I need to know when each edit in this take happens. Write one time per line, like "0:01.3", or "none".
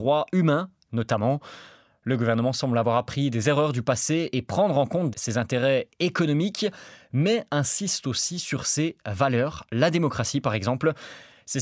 0:05.1

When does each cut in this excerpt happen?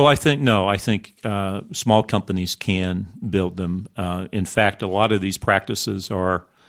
none

